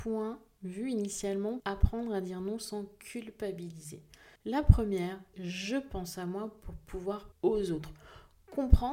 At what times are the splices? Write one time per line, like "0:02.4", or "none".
0:01.6
0:04.4
0:05.3
0:07.3